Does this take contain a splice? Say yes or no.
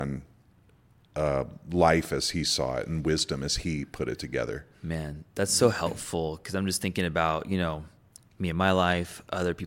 no